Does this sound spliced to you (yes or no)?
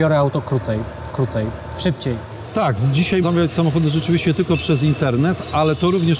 yes